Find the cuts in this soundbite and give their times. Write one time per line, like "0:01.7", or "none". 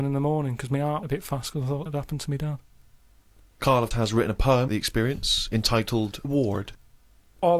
0:01.0
0:01.9
0:03.9
0:04.7
0:06.2